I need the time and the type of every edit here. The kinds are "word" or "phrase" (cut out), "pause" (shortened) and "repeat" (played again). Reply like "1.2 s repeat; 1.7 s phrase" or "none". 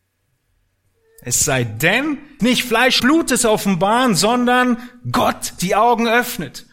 2.4 s word; 3.0 s word; 5.6 s word